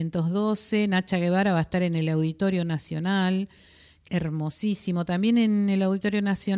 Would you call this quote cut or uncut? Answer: cut